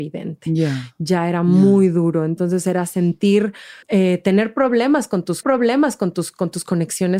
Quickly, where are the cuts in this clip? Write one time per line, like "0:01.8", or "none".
0:03.8
0:05.4

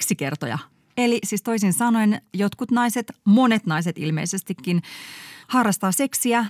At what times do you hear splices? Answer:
0:05.4

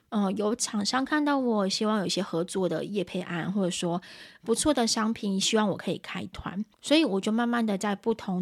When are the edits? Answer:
0:06.7

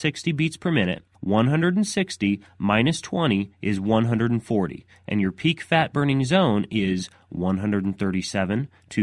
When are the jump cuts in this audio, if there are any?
0:01.1

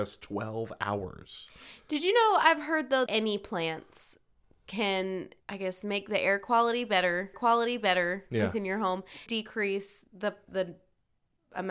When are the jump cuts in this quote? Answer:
0:03.1
0:05.4
0:07.3
0:09.3
0:10.5

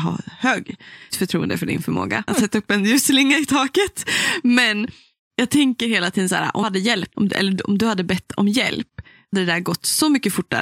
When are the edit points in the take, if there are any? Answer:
0:01.1
0:02.3
0:06.6
0:07.1
0:09.3

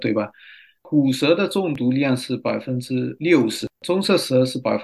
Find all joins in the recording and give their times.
0:03.8

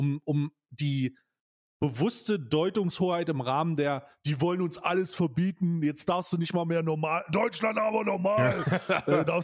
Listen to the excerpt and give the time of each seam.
none

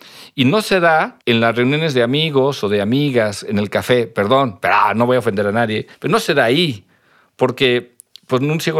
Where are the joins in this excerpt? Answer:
0:01.2
0:05.9

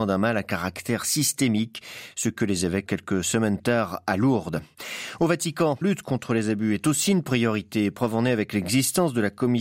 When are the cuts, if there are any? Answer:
0:02.9
0:03.6
0:05.8

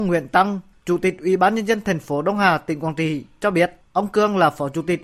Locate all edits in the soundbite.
0:03.8

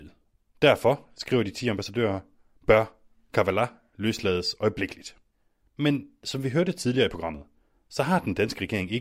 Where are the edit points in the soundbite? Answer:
none

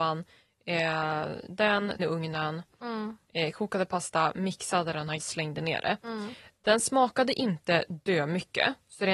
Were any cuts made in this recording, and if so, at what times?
0:01.5
0:02.0
0:05.2

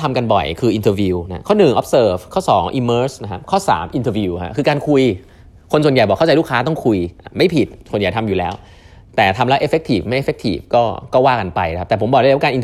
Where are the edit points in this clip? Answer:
none

